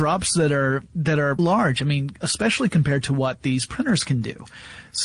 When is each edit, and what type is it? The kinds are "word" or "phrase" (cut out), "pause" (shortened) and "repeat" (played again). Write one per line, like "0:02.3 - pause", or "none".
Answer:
0:01.4 - word